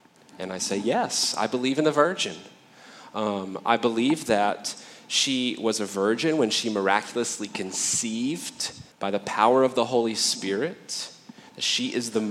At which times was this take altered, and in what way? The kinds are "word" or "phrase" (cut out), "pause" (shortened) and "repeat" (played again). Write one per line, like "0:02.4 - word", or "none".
0:08.9 - pause